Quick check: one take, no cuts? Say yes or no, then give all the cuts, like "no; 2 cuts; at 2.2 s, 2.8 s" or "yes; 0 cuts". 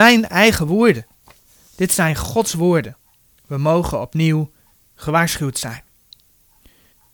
yes; 0 cuts